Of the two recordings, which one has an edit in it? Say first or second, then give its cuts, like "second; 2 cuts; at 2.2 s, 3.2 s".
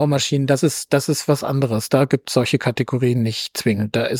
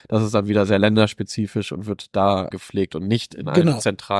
second; 1 cut; at 2.5 s